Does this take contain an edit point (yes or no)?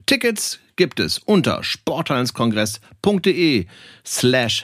no